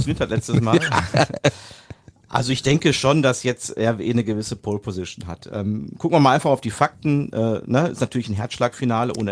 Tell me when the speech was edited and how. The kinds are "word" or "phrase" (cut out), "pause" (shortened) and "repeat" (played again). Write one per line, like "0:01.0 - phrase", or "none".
none